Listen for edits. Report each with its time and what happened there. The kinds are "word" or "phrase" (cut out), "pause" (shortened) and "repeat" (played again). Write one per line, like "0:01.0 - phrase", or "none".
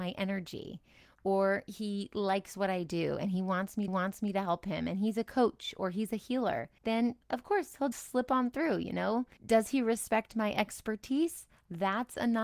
0:03.9 - repeat
0:07.9 - word